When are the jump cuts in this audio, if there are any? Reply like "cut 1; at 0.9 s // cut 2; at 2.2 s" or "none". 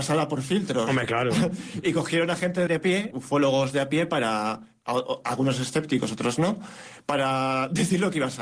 cut 1; at 2.7 s // cut 2; at 3.1 s